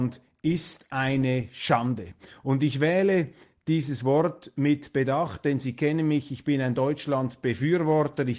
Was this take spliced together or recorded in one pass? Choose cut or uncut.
uncut